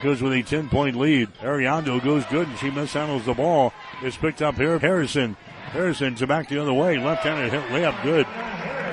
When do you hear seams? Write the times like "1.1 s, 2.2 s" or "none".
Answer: 1.3 s, 2.2 s, 4.8 s, 6.2 s